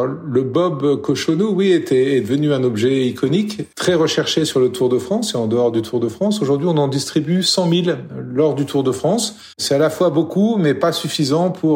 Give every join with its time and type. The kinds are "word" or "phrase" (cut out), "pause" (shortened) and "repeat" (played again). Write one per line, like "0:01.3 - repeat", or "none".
0:09.5 - pause